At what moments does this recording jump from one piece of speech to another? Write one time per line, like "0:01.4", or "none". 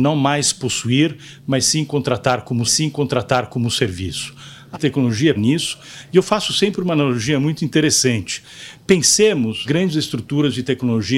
0:02.6
0:04.7
0:05.3
0:09.6

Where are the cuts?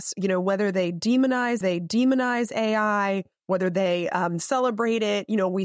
0:01.6

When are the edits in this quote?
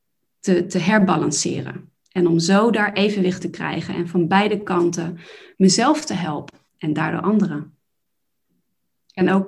0:03.4
0:06.7

